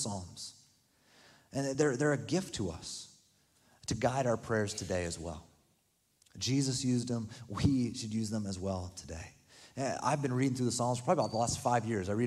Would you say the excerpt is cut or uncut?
uncut